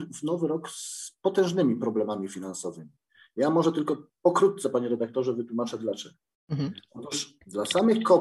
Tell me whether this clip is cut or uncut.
uncut